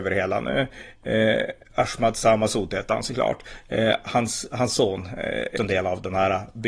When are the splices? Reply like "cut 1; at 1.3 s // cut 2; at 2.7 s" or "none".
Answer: cut 1; at 5.6 s

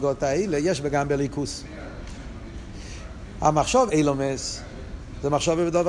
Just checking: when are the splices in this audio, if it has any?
cut 1; at 3.9 s

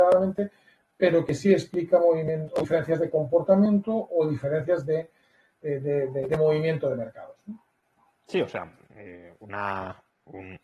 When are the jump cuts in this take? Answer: none

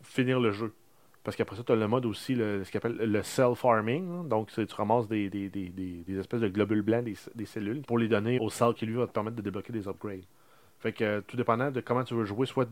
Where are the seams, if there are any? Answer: cut 1; at 5.3 s // cut 2; at 7.8 s // cut 3; at 8.4 s // cut 4; at 8.7 s

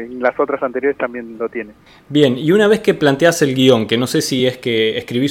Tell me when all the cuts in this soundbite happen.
none

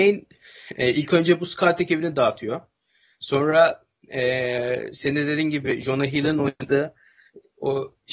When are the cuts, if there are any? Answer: none

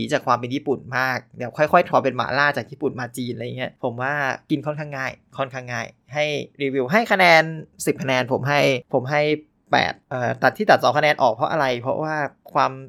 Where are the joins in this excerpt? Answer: cut 1; at 1.9 s

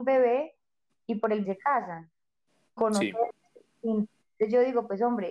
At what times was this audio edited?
cut 1; at 1.4 s // cut 2; at 2.8 s

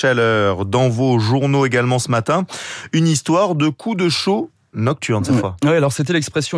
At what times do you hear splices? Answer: none

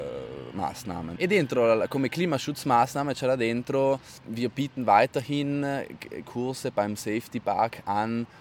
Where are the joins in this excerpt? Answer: cut 1; at 1.2 s // cut 2; at 6.2 s

